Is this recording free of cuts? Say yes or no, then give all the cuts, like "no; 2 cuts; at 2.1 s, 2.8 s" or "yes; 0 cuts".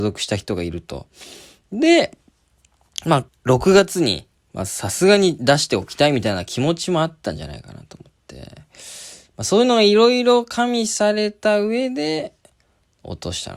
no; 1 cut; at 3.3 s